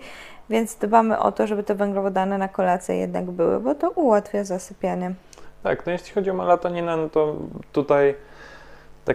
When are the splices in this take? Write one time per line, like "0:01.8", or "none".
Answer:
none